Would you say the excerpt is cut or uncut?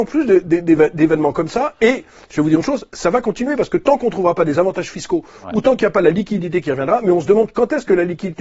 uncut